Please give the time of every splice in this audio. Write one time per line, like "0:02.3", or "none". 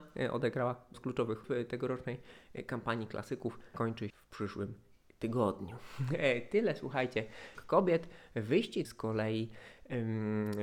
0:00.9
0:01.4
0:03.7
0:04.1
0:07.5
0:08.8